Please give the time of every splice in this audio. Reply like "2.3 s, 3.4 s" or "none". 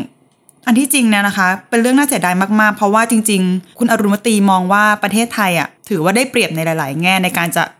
5.8 s